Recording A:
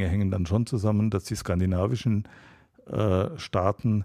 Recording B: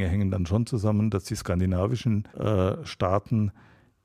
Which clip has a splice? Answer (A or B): B